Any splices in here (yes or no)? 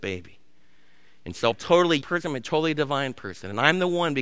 yes